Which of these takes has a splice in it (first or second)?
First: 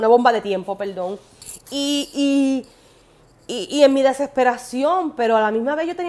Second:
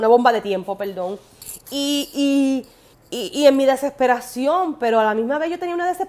second